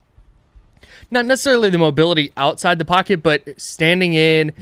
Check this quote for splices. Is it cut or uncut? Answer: uncut